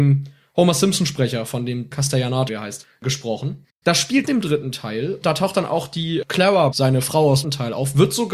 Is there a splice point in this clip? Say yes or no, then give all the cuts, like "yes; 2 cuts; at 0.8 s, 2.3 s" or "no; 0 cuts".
yes; 6 cuts; at 1.9 s, 2.5 s, 4.2 s, 5.2 s, 6.7 s, 7.4 s